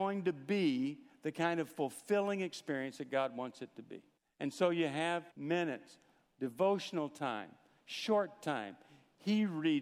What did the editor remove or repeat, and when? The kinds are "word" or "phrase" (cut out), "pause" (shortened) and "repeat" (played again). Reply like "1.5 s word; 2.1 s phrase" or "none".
4.2 s pause; 5.3 s word